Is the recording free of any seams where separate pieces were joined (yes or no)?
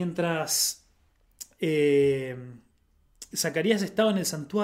no